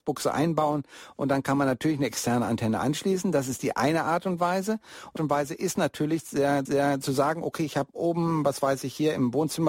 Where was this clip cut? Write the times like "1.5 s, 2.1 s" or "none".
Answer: 5.2 s, 6.7 s

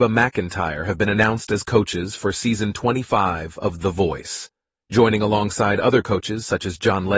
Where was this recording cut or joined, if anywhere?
none

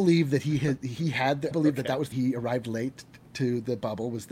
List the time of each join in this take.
1.5 s, 2.1 s

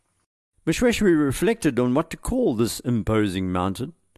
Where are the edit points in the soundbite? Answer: none

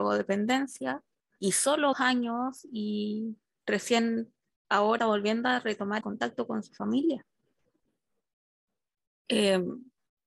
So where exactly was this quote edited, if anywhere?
1.4 s, 1.9 s, 5.0 s, 6.0 s

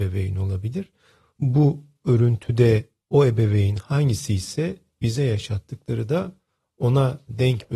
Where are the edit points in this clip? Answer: none

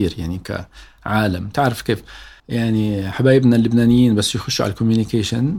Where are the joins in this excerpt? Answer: 2.4 s

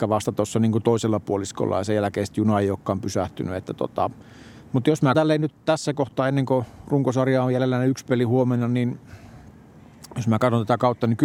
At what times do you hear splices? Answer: 5.1 s

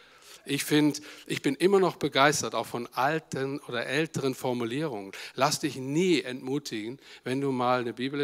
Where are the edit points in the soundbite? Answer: none

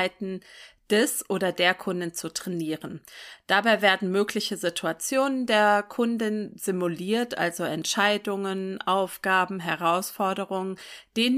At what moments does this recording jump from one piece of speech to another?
none

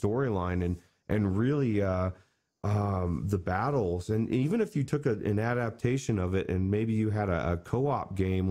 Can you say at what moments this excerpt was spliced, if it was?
none

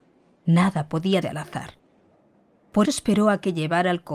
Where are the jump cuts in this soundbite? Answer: 1.2 s, 2.8 s

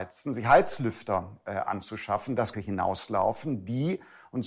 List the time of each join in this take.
2.5 s

